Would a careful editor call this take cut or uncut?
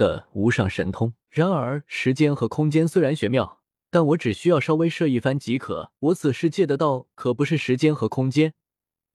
cut